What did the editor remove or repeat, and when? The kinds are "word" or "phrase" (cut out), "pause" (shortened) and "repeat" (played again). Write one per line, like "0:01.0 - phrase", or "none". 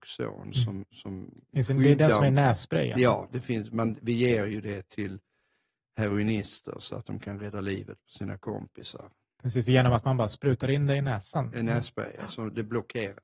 none